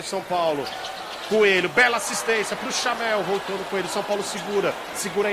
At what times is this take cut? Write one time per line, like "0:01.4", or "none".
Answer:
none